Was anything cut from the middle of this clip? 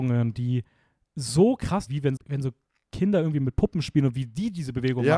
yes; 2 cuts; at 1.9 s, 2.2 s

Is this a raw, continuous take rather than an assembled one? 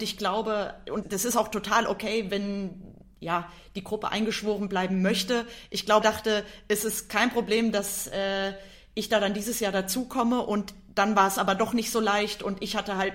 no; 2 cuts; at 1.0 s, 6.0 s

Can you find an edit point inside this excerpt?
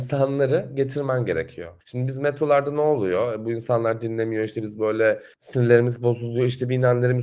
yes; 2 cuts; at 1.8 s, 5.3 s

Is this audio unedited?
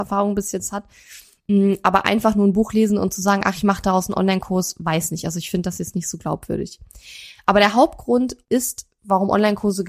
no; 1 cut; at 8.4 s

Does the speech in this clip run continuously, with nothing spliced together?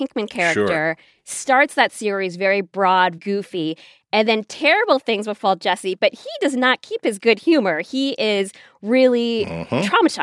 no; 1 cut; at 3.2 s

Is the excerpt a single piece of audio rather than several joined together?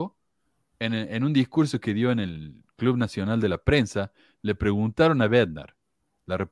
yes; 0 cuts

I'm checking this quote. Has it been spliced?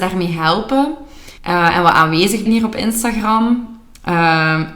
yes; 2 cuts; at 1.4 s, 2.5 s

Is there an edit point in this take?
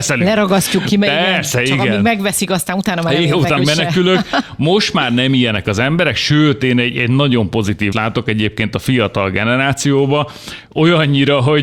yes; 2 cuts; at 3.6 s, 7.9 s

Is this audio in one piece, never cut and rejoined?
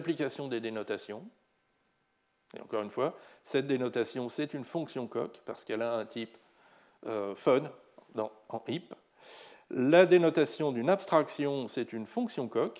yes; 0 cuts

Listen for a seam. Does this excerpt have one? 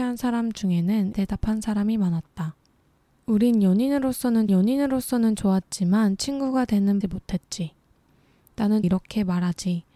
yes; 4 cuts; at 1.1 s, 4.5 s, 7.0 s, 8.8 s

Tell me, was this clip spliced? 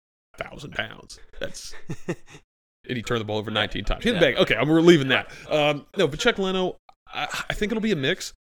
no; 0 cuts

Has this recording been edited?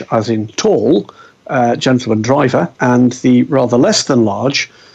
yes; 1 cut; at 2.7 s

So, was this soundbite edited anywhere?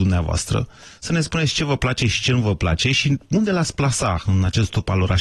no; 0 cuts

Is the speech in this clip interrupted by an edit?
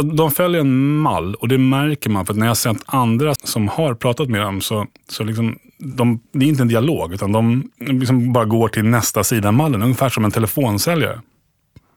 yes; 3 cuts; at 3.4 s, 4.9 s, 6.3 s

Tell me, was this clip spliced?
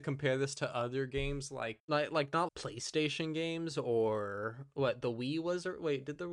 yes; 2 cuts; at 1.8 s, 2.5 s

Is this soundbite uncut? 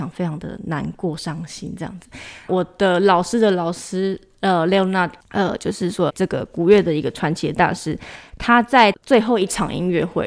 no; 1 cut; at 6.1 s

